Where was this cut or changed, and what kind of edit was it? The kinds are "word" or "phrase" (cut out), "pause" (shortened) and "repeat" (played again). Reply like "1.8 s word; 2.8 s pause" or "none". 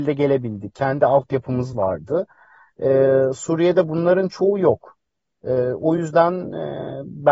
none